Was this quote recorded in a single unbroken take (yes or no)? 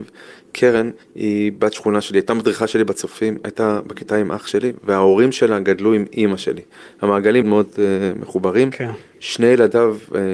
no